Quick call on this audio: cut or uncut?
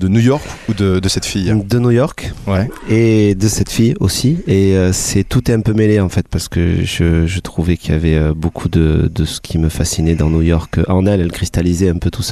uncut